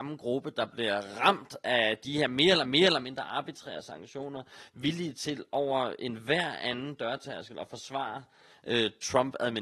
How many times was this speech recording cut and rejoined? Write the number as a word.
one